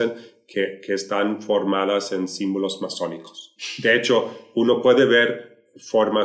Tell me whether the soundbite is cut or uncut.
uncut